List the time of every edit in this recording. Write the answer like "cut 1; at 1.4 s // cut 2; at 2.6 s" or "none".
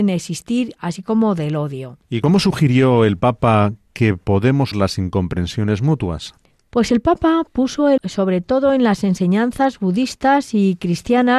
cut 1; at 2.0 s // cut 2; at 4.7 s // cut 3; at 8.0 s